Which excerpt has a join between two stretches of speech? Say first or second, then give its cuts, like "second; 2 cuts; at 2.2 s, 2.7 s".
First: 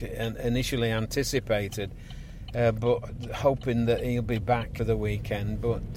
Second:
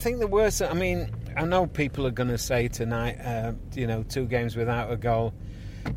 first; 1 cut; at 4.8 s